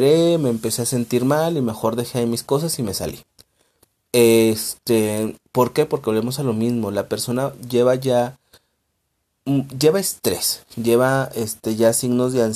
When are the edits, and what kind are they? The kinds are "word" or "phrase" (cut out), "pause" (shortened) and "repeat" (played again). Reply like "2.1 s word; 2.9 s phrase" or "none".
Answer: 5.5 s pause